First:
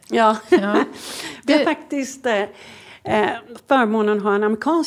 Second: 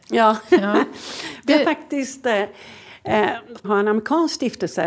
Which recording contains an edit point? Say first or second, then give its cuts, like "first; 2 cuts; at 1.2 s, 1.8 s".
second; 1 cut; at 3.6 s